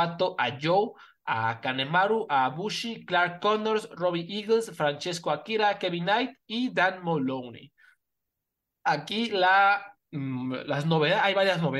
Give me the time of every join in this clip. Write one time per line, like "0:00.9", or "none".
none